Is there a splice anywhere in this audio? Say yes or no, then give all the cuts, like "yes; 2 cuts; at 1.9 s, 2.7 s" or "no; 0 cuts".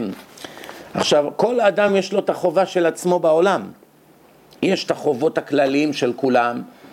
no; 0 cuts